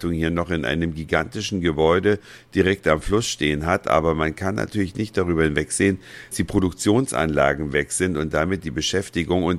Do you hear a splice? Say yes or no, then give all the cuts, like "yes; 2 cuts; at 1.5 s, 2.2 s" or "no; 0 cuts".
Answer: yes; 1 cut; at 6.3 s